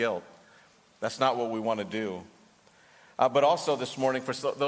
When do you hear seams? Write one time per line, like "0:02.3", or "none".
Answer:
none